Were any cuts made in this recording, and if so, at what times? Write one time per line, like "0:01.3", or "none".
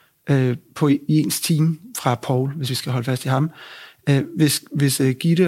none